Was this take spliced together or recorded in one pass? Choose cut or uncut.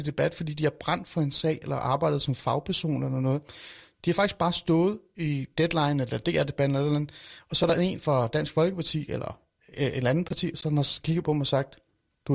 uncut